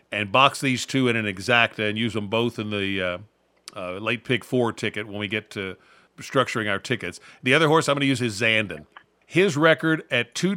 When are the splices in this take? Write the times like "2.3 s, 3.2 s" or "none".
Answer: none